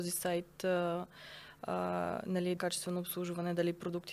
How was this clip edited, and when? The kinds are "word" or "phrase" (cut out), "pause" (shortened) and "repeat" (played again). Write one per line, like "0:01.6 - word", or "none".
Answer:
0:02.6 - phrase